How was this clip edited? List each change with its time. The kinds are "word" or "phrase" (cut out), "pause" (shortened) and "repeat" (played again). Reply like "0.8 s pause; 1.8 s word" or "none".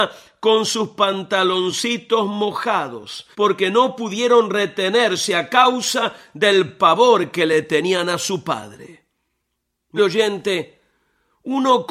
3.3 s pause; 10.0 s word